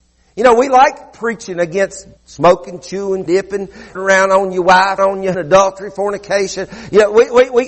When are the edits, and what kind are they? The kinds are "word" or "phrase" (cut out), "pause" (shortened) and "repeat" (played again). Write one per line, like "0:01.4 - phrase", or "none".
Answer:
0:02.2 - pause
0:03.3 - word
0:03.9 - word
0:05.0 - phrase
0:05.3 - word